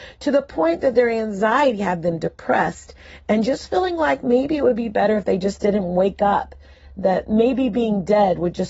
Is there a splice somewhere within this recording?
no; 0 cuts

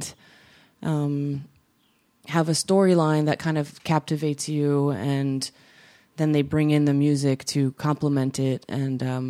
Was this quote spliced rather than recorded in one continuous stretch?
no; 0 cuts

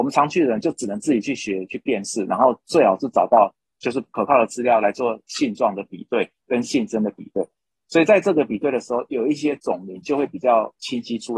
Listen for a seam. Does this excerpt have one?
no; 0 cuts

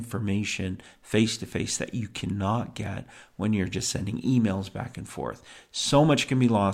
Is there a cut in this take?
no; 0 cuts

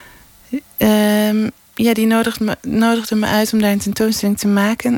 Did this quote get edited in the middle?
no; 0 cuts

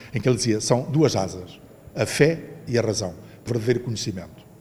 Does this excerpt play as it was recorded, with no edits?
no; 1 cut; at 3.5 s

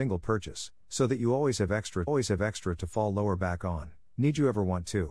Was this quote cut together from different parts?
yes; 1 cut; at 2.1 s

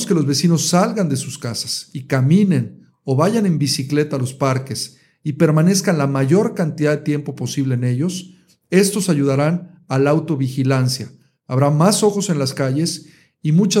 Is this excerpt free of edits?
yes; 0 cuts

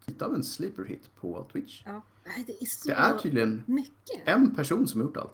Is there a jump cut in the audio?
no; 0 cuts

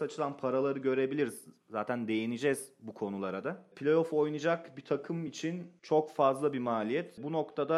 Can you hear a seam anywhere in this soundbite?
no; 0 cuts

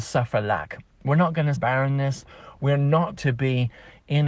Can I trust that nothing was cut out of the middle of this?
no; 2 cuts; at 1.6 s, 3.2 s

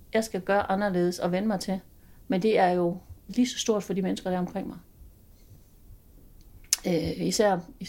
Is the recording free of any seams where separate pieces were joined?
no; 1 cut; at 2.0 s

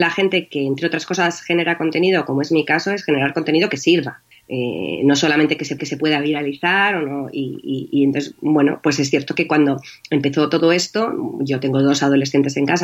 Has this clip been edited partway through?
yes; 2 cuts; at 4.3 s, 5.8 s

